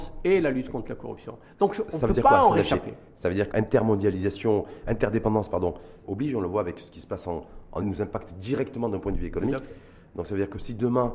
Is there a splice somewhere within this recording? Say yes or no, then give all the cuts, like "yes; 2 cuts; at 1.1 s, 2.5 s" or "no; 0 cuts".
yes; 3 cuts; at 3.5 s, 6.0 s, 7.8 s